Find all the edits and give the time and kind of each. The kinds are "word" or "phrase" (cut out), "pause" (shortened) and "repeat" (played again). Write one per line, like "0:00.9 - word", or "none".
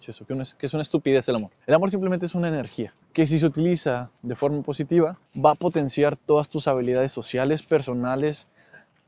0:01.6 - pause
0:03.0 - pause
0:05.3 - pause